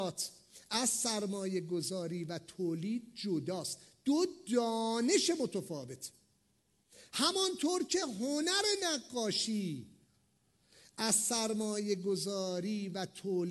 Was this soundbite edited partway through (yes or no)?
no